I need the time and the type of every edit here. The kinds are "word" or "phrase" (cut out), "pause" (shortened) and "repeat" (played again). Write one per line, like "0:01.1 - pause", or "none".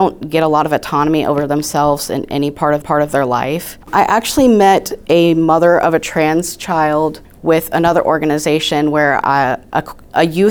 0:02.8 - repeat
0:03.8 - pause
0:07.2 - pause

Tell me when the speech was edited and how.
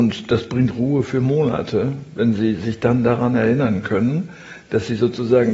none

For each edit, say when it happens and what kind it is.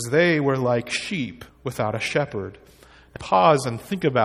0:01.5 - pause
0:03.2 - phrase

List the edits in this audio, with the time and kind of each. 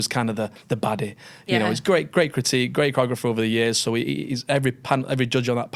none

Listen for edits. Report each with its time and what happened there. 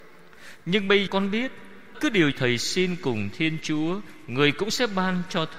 0:01.1 - word
0:01.9 - word
0:02.3 - word

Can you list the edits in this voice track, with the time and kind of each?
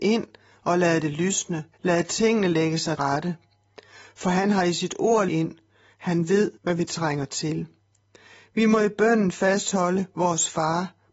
0:01.7 - pause
0:03.0 - word
0:05.3 - phrase
0:06.6 - pause

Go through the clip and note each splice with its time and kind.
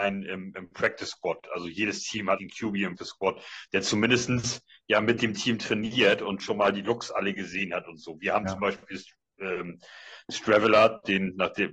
0:02.4 - word
0:03.0 - word

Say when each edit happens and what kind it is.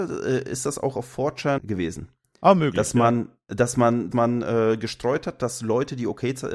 0:01.6 - phrase
0:04.1 - word

